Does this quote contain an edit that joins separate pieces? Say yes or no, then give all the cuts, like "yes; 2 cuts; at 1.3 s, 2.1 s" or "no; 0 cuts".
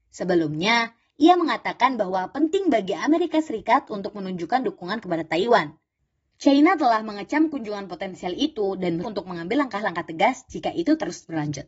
yes; 1 cut; at 9.0 s